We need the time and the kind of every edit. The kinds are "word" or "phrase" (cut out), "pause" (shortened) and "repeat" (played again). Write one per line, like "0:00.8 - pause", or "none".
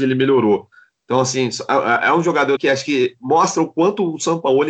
0:02.6 - word